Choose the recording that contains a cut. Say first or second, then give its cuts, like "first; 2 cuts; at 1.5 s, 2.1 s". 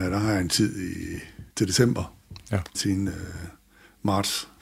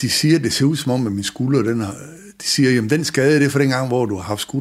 first; 2 cuts; at 1.5 s, 2.7 s